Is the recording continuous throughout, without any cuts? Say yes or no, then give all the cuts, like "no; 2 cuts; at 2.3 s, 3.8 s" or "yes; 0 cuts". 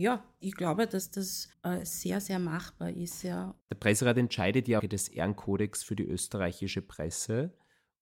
no; 3 cuts; at 1.5 s, 3.6 s, 4.8 s